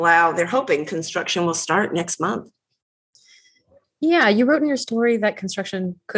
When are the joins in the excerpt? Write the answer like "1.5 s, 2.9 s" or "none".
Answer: none